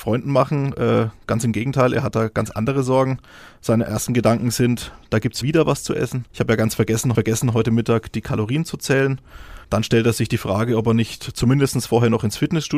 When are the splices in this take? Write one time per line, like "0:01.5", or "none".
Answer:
0:05.4
0:06.3
0:07.1
0:09.6